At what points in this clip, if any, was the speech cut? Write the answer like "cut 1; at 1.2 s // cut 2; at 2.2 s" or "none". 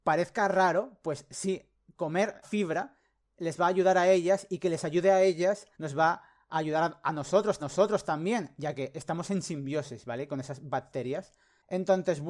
cut 1; at 2.4 s // cut 2; at 5.7 s // cut 3; at 7.6 s